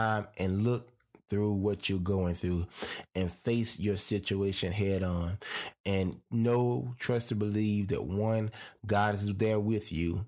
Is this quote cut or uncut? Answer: uncut